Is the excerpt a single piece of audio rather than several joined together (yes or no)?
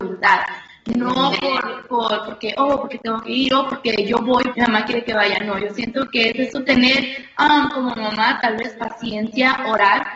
no